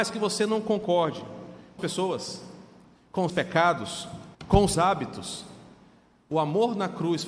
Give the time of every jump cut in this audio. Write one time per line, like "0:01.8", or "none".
0:01.8
0:03.3
0:04.3
0:04.7